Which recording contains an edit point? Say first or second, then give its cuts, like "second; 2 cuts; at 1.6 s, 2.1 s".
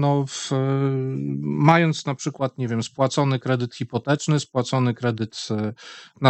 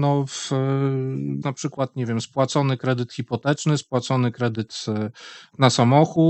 second; 1 cut; at 1.4 s